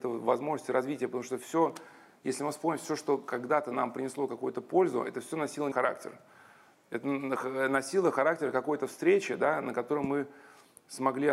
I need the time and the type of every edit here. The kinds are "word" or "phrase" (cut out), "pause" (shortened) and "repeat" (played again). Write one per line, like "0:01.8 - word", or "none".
0:05.7 - word